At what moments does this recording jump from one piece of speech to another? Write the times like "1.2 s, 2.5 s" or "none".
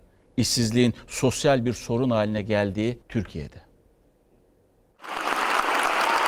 3.0 s